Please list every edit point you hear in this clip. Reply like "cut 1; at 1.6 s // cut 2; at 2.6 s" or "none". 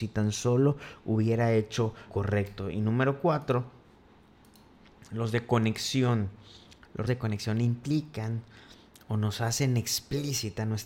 cut 1; at 2.1 s // cut 2; at 7.1 s